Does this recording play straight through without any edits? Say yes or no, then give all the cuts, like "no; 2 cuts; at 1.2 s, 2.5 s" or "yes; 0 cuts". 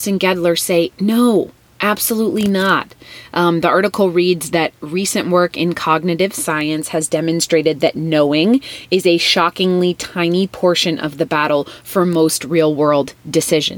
yes; 0 cuts